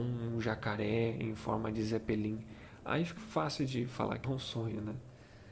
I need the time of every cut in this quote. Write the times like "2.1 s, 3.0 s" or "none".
3.2 s, 4.2 s